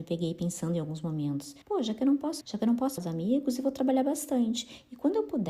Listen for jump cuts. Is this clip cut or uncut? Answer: cut